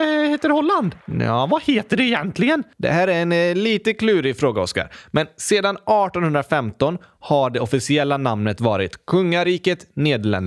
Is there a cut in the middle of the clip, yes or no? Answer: yes